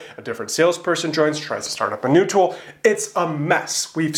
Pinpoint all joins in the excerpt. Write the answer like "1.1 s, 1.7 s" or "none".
none